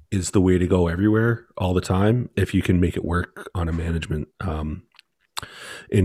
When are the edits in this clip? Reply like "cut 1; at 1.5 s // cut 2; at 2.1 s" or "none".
cut 1; at 4.3 s